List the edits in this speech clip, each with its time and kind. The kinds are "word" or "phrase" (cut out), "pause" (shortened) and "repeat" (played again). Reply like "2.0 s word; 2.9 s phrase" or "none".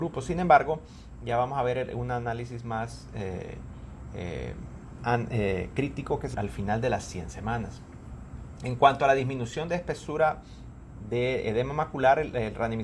6.3 s phrase